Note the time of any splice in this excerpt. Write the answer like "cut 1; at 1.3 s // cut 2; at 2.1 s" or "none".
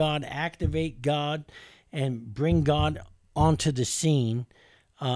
none